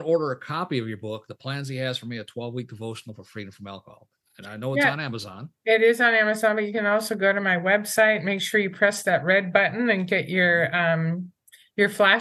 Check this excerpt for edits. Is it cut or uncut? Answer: uncut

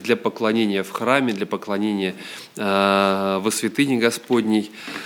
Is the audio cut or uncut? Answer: uncut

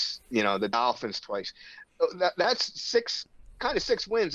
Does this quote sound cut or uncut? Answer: uncut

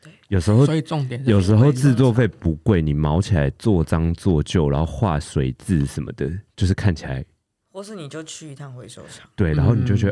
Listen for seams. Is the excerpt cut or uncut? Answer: uncut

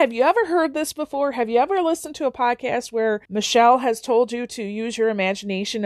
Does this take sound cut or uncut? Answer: cut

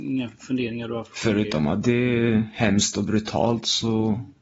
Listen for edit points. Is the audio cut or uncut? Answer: uncut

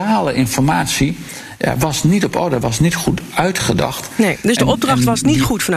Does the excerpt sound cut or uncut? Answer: uncut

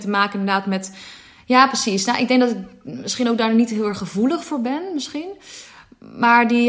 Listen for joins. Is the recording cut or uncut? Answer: uncut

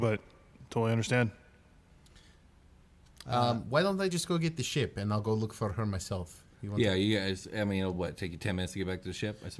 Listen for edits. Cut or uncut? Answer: uncut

